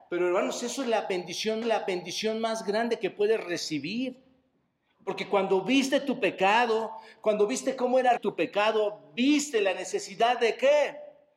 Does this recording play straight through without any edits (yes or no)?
no